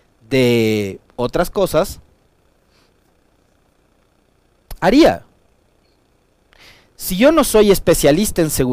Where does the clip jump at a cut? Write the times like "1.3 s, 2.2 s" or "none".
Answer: none